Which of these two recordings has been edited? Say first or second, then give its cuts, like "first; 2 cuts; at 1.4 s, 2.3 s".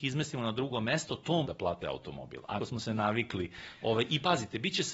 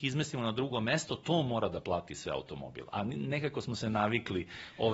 first; 3 cuts; at 1.4 s, 1.8 s, 2.6 s